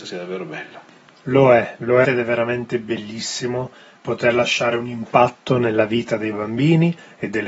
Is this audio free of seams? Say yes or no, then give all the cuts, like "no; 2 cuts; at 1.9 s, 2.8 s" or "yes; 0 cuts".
no; 1 cut; at 2.0 s